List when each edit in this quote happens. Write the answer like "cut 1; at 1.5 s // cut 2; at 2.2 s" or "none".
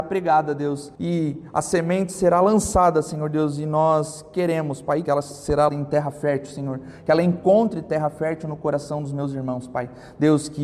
cut 1; at 1.0 s // cut 2; at 5.0 s // cut 3; at 5.7 s